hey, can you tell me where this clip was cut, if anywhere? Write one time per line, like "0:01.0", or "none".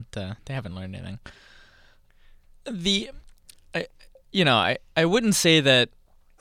none